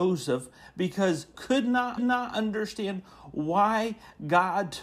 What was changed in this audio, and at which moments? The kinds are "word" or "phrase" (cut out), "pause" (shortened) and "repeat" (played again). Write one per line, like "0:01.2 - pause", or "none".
0:01.3 - word
0:02.0 - repeat

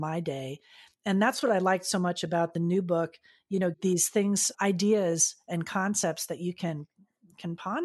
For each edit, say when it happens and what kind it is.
0:03.7 - phrase
0:04.5 - word

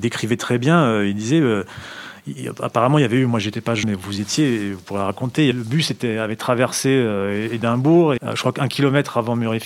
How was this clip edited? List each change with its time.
0:03.8 - word
0:05.5 - phrase
0:08.2 - word

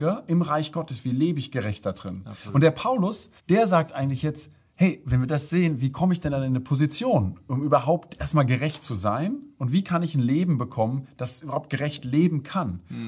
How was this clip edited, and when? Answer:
0:03.4 - pause

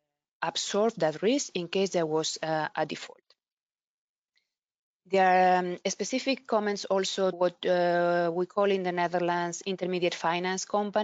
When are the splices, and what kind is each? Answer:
0:07.3 - word

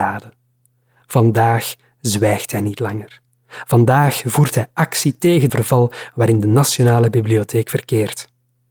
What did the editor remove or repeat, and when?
0:05.5 - phrase

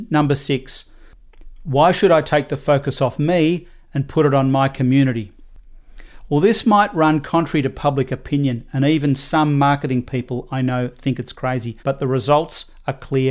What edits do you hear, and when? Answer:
0:11.8 - pause

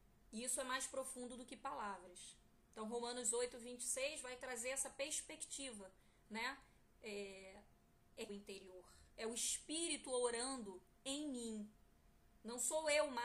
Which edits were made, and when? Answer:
0:08.3 - phrase
0:09.1 - pause

